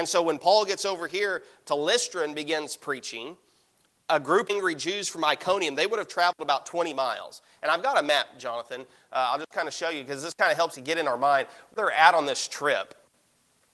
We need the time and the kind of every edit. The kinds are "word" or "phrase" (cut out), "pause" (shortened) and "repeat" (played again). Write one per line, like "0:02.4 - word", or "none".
0:04.5 - word
0:10.7 - word
0:11.8 - word